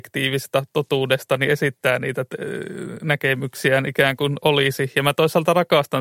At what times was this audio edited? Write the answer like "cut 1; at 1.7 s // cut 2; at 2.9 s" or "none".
none